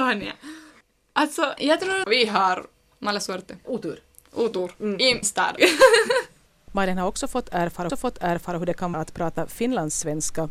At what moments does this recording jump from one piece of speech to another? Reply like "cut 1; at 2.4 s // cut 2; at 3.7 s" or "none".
cut 1; at 2.0 s // cut 2; at 3.6 s // cut 3; at 5.2 s // cut 4; at 7.9 s // cut 5; at 8.9 s